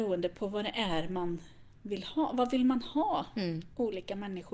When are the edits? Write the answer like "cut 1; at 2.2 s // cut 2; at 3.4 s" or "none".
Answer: none